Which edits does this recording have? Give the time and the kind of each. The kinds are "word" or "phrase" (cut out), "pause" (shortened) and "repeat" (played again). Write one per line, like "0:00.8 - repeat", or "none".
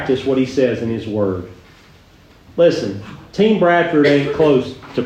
none